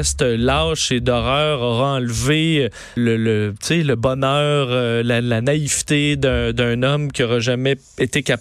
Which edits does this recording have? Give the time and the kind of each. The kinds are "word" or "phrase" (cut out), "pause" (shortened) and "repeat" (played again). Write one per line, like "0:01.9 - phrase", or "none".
0:03.0 - word